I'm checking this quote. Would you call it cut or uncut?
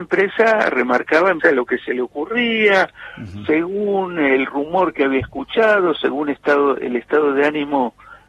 cut